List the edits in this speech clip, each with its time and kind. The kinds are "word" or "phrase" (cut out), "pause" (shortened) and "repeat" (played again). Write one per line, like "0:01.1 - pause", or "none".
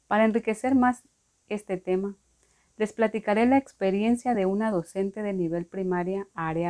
none